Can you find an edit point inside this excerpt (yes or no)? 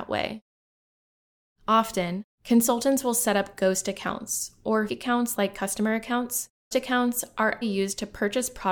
yes